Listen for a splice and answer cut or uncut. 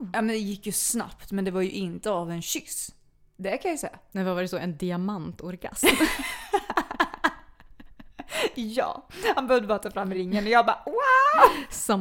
uncut